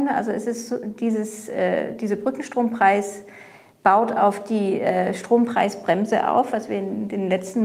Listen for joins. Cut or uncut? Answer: uncut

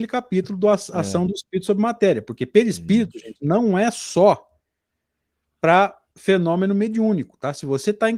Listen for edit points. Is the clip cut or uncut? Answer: uncut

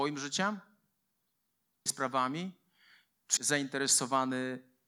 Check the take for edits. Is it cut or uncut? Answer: cut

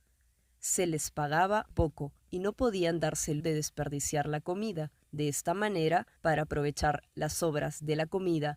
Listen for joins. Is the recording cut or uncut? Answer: cut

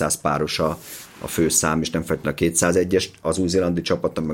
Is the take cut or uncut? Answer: uncut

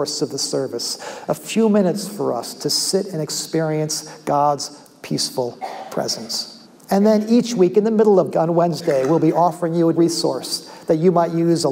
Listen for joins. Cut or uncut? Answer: cut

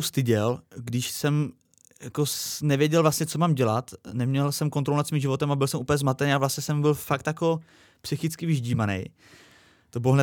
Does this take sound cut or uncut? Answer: uncut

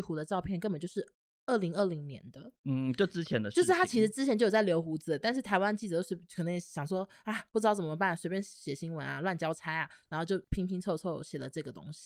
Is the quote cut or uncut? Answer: uncut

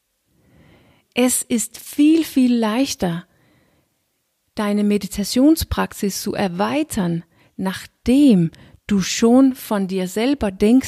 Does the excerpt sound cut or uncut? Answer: uncut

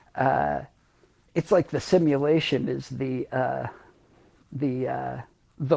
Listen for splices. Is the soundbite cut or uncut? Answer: uncut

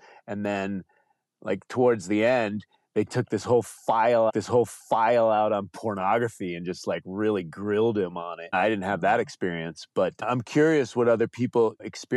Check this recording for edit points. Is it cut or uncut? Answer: cut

